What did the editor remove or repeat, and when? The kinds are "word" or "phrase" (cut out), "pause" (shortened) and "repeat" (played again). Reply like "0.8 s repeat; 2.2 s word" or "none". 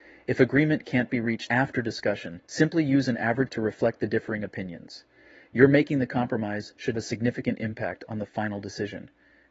1.5 s word; 2.4 s pause; 3.5 s word; 6.9 s phrase

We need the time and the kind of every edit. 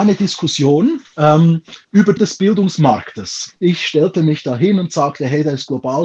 1.8 s pause; 2.2 s word

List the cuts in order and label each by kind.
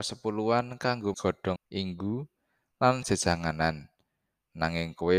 1.1 s word; 1.6 s word; 3.0 s word

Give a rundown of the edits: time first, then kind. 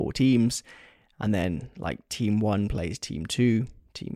none

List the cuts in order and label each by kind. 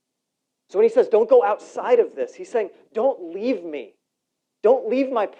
none

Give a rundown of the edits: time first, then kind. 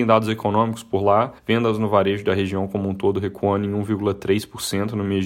1.4 s pause

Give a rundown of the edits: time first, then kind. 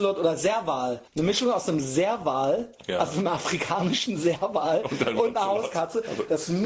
1.1 s pause

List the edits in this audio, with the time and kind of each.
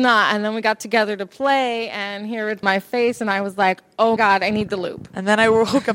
2.6 s word; 4.2 s word

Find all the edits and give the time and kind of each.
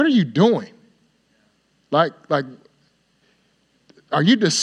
none

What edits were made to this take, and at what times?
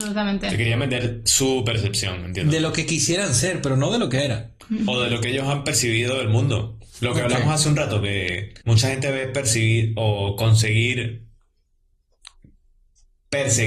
8.6 s pause

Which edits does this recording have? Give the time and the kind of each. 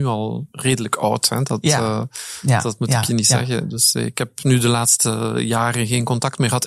none

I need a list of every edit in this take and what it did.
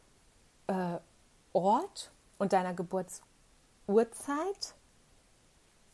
none

